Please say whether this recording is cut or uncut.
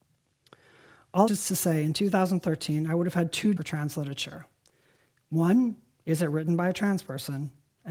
cut